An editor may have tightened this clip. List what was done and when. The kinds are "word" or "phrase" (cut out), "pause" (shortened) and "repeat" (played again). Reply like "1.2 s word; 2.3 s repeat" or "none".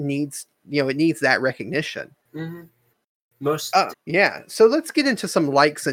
2.2 s pause; 3.9 s word